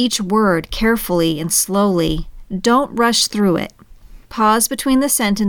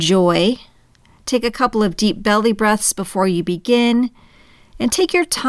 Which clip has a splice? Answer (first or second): first